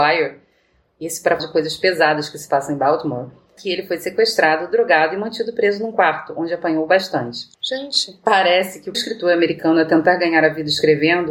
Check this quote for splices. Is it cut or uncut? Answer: cut